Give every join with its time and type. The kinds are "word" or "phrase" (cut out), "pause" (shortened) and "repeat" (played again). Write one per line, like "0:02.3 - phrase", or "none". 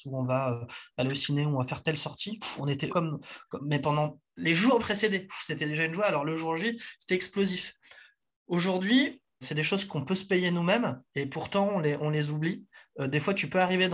0:02.9 - word
0:04.3 - pause
0:04.8 - phrase
0:09.4 - word
0:11.0 - pause

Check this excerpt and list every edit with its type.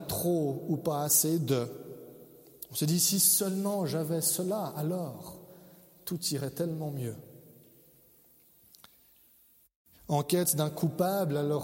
none

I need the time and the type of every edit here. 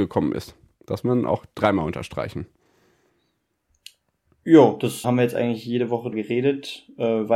0:01.0 - word
0:05.0 - word
0:06.1 - word

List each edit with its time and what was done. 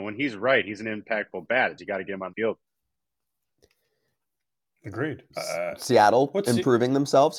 0:01.8 - word
0:02.3 - word
0:05.3 - pause

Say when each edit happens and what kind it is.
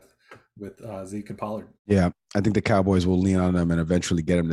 0:01.8 - pause

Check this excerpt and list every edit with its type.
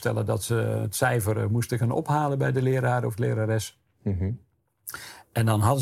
none

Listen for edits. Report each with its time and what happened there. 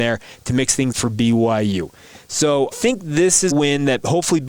0:00.9 - word
0:02.7 - word
0:03.5 - word

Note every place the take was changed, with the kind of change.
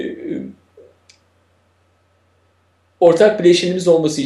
none

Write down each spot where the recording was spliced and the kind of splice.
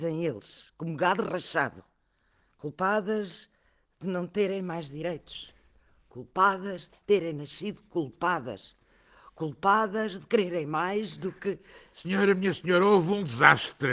none

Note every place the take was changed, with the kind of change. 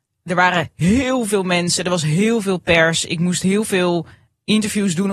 none

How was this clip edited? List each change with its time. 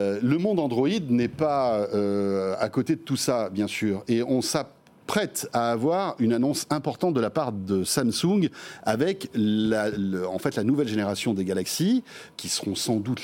none

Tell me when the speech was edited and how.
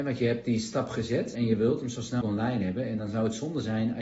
0:01.3 - word
0:02.2 - word

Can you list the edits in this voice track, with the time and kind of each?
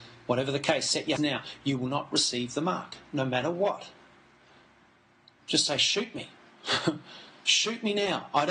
0:01.2 - word

